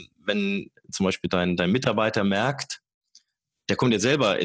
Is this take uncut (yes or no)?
yes